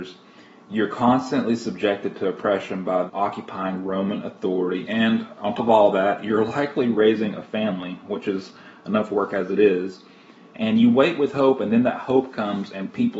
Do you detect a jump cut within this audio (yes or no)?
yes